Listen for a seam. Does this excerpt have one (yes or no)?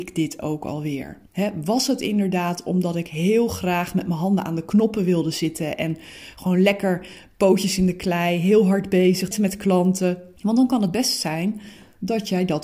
yes